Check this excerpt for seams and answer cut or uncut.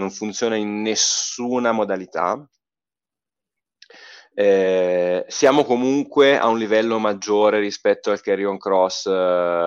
uncut